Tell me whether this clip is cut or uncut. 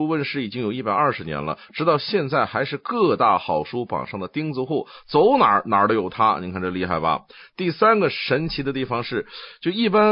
uncut